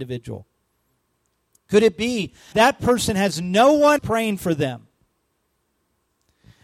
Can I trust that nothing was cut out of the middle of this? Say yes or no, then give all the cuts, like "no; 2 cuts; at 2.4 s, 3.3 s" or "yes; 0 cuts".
no; 2 cuts; at 2.5 s, 4.0 s